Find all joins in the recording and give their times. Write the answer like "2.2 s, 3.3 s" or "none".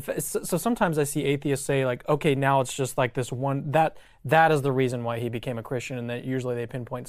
none